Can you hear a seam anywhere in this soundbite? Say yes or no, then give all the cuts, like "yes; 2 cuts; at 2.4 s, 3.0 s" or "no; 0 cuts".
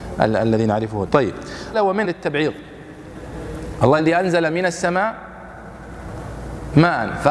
yes; 4 cuts; at 1.1 s, 1.7 s, 2.0 s, 4.0 s